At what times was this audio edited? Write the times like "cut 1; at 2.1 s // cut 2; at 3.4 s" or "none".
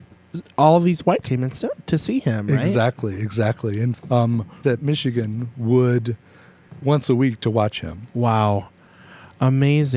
cut 1; at 1.2 s // cut 2; at 4.0 s // cut 3; at 4.6 s // cut 4; at 6.8 s

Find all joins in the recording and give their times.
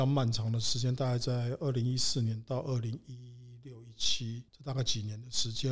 cut 1; at 4.5 s

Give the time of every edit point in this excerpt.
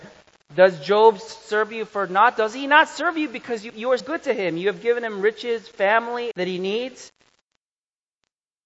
cut 1; at 3.7 s // cut 2; at 4.0 s // cut 3; at 6.3 s

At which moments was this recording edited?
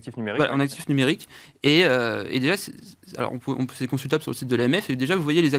none

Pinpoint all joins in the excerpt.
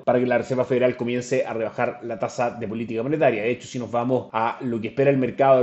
none

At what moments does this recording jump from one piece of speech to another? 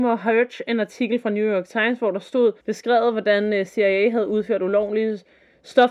cut 1; at 2.6 s

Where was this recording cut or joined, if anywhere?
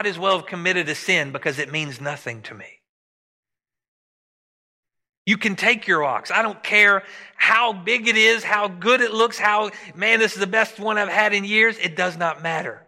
none

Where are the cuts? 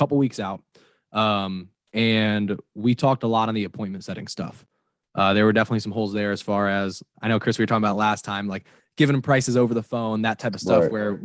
cut 1; at 7.1 s

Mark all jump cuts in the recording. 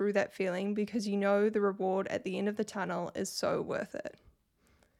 none

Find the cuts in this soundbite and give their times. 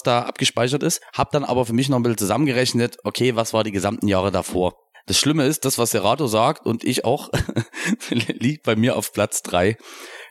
none

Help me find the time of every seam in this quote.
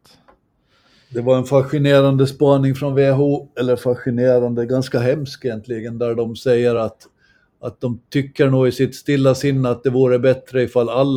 none

